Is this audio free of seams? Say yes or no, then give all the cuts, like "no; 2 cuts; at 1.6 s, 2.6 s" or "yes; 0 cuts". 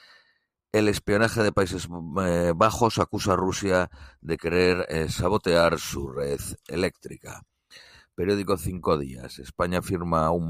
yes; 0 cuts